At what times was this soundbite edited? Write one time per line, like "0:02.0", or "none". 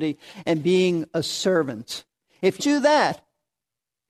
0:02.6